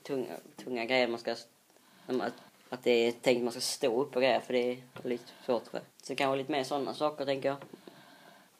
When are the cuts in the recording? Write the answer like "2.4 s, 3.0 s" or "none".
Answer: 2.5 s, 5.9 s